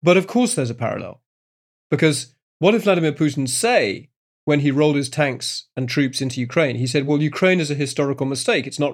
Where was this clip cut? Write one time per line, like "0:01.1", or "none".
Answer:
none